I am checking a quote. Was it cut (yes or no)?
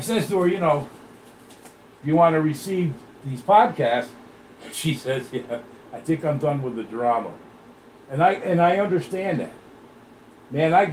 no